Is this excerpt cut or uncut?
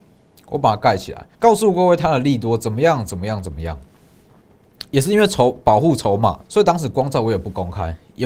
cut